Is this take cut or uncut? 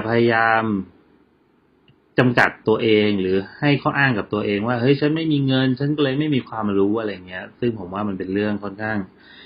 uncut